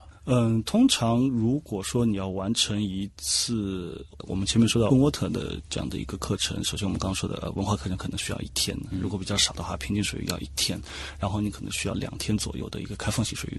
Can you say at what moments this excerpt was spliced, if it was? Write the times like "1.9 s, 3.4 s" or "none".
4.9 s

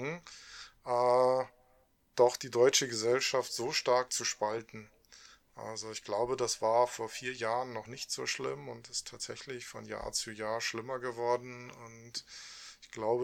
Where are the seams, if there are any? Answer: none

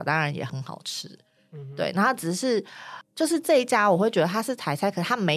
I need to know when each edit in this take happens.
none

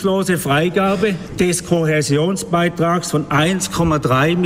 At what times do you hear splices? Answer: none

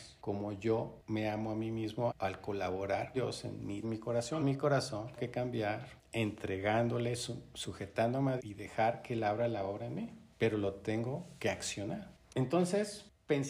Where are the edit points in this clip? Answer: 2.1 s, 3.1 s, 3.8 s, 4.4 s, 5.2 s, 8.4 s

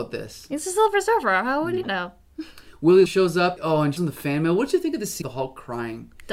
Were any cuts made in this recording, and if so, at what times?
1.8 s, 3.1 s, 3.6 s, 4.0 s, 5.2 s

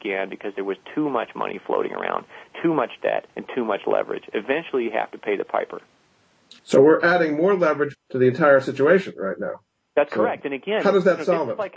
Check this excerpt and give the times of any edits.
3.3 s, 6.6 s, 7.9 s

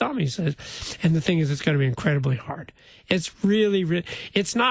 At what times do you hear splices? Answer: none

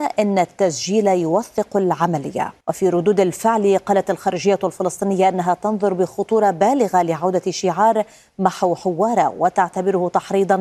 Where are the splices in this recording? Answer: 2.6 s

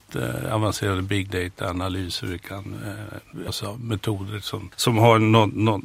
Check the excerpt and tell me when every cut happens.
3.5 s

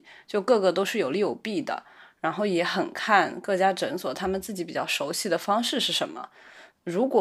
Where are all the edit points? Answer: none

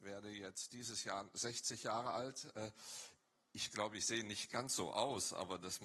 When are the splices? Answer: none

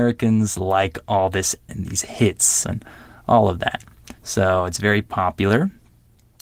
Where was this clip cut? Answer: 1.7 s, 2.6 s, 4.2 s

